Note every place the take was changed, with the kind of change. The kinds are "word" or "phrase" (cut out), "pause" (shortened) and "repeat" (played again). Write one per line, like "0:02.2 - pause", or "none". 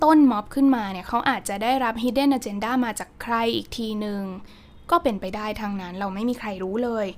none